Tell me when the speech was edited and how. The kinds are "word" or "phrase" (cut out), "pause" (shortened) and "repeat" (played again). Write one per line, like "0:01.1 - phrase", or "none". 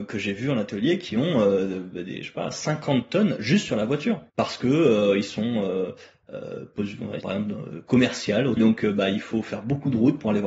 0:04.3 - pause
0:07.2 - word
0:08.6 - word